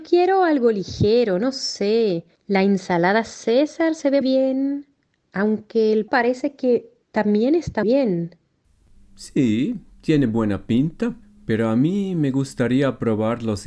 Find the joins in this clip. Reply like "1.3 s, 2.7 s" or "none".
2.4 s, 4.2 s, 6.1 s, 7.0 s, 7.8 s, 11.2 s